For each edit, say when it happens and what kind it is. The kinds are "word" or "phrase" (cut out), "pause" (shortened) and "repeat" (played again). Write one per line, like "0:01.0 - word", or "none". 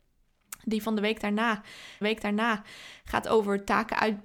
0:02.0 - repeat